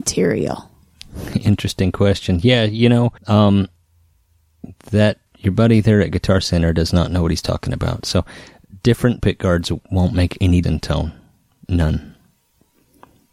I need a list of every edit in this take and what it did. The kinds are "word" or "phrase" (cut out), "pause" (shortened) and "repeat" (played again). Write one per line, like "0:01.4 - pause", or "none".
0:03.2 - pause
0:05.3 - word
0:09.2 - word
0:10.6 - word